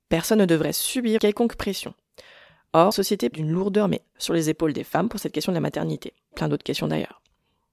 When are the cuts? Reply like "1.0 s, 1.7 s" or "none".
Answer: 1.2 s, 2.9 s, 3.3 s, 4.1 s, 6.3 s